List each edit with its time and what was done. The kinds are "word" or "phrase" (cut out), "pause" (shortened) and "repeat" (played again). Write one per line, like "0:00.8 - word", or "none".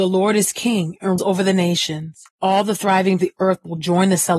0:01.2 - word
0:02.3 - pause
0:03.2 - phrase